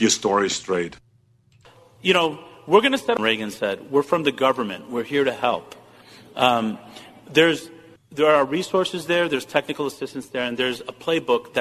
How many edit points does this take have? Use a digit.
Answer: 1